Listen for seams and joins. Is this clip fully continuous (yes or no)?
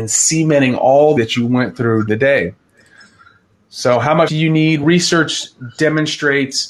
no